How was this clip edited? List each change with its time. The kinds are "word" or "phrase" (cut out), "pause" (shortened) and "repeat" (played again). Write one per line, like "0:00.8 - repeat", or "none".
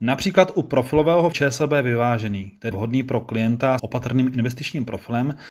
0:01.3 - word
0:02.7 - word
0:03.8 - word

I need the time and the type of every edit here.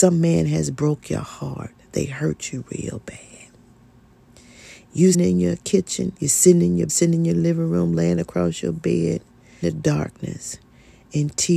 0:05.1 - word
0:06.2 - pause
0:06.9 - word
0:09.6 - word

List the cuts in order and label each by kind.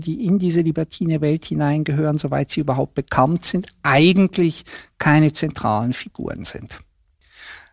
none

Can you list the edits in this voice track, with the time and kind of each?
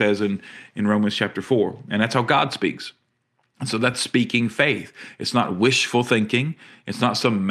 none

